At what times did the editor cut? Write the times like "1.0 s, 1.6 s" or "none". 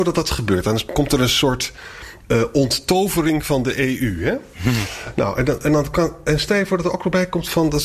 2.2 s